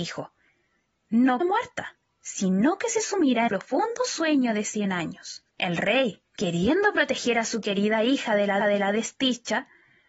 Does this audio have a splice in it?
yes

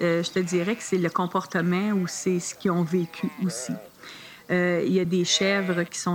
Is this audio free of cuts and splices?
yes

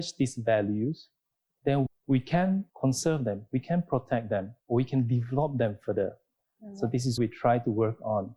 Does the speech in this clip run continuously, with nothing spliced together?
no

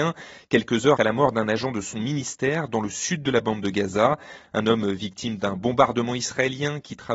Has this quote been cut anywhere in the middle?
yes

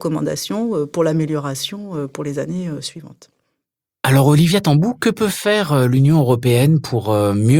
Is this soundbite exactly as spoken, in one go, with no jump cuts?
yes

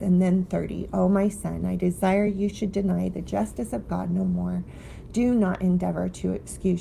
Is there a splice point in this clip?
no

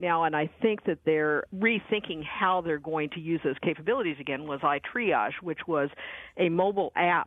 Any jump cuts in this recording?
yes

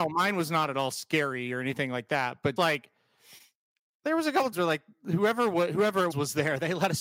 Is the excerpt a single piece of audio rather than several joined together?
no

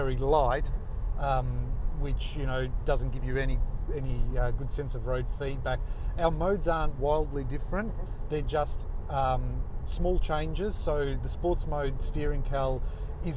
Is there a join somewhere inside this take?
no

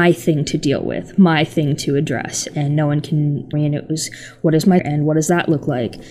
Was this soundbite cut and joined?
yes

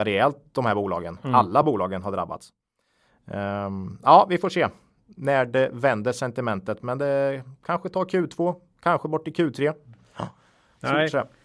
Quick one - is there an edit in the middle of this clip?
no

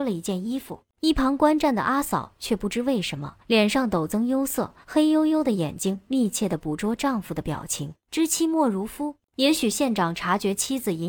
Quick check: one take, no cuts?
no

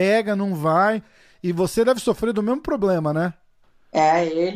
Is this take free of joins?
yes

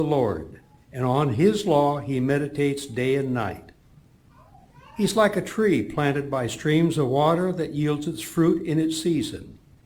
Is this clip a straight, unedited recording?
yes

